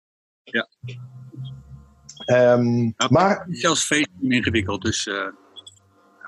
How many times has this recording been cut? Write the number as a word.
zero